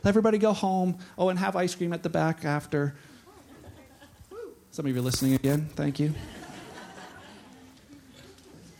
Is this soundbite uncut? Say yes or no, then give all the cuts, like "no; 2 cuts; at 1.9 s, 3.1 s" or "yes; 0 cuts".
yes; 0 cuts